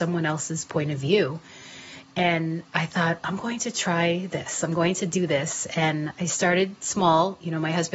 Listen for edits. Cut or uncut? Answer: uncut